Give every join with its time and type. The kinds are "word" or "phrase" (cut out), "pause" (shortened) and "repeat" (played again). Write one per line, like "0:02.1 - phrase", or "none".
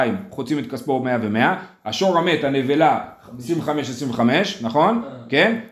none